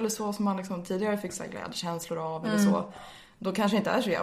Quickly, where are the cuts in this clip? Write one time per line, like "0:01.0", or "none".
none